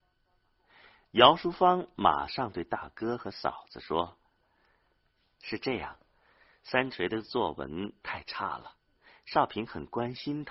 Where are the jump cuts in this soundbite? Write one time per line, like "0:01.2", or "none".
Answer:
none